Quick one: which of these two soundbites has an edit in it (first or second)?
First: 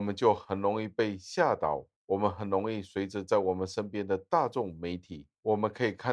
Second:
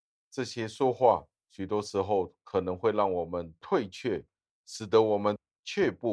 first